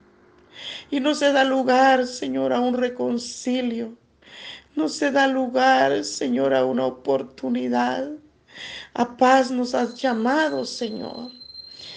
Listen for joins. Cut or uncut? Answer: uncut